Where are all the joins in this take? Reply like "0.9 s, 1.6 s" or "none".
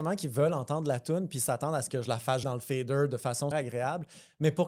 2.4 s, 3.5 s